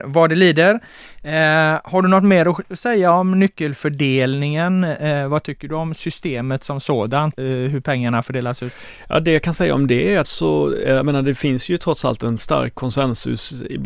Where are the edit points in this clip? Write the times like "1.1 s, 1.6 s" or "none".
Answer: 7.4 s, 10.2 s